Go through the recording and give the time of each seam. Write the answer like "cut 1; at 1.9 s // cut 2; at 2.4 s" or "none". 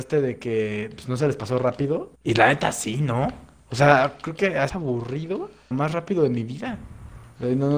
cut 1; at 2.2 s // cut 2; at 4.7 s // cut 3; at 5.7 s